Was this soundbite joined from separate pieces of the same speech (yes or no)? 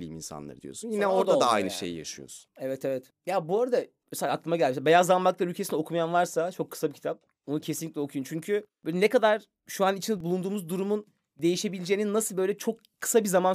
no